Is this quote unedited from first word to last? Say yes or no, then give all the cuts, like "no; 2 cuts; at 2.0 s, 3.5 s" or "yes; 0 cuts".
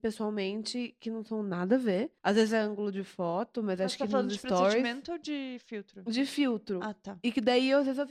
no; 1 cut; at 2.2 s